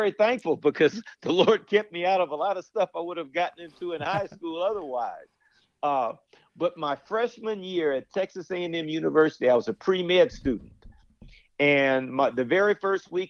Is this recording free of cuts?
yes; 0 cuts

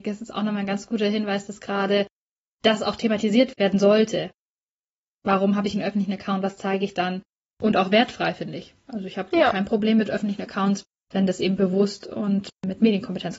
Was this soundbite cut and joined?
no; 0 cuts

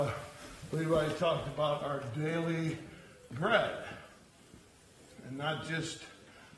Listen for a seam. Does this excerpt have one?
no; 0 cuts

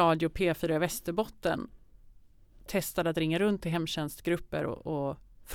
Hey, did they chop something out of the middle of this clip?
no; 0 cuts

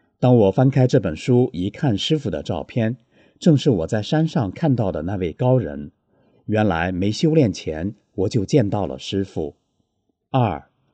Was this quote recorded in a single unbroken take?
yes; 0 cuts

